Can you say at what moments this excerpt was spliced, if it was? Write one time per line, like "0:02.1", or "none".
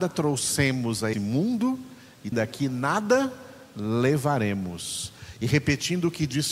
0:01.1
0:02.3